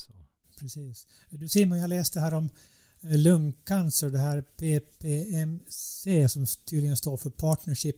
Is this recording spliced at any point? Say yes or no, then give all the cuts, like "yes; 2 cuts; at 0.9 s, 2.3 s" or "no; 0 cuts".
no; 0 cuts